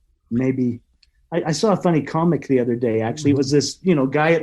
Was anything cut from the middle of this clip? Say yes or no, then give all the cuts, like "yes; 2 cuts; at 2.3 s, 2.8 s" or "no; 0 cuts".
no; 0 cuts